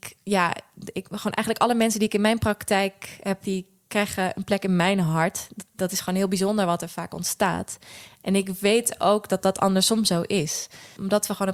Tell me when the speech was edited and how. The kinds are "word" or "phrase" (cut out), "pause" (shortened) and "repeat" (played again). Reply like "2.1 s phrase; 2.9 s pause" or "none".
3.4 s word; 5.7 s word